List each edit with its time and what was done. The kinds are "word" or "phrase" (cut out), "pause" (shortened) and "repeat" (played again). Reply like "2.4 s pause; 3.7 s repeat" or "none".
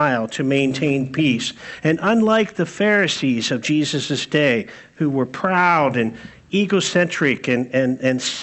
none